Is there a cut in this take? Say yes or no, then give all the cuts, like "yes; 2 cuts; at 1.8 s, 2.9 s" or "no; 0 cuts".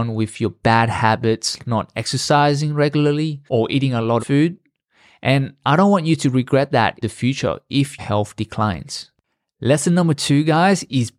yes; 5 cuts; at 1.6 s, 3.5 s, 4.2 s, 7.0 s, 8.0 s